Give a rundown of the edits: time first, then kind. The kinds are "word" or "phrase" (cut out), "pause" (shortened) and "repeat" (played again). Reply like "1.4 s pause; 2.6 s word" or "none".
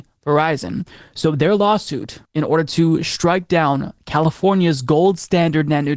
2.3 s pause